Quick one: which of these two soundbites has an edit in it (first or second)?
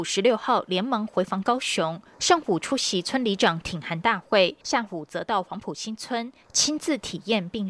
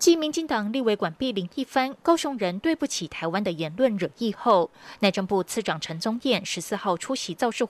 first